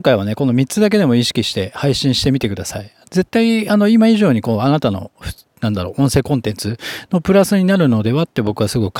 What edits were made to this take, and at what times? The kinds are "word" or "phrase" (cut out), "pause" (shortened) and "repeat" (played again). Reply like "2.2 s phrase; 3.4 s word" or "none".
none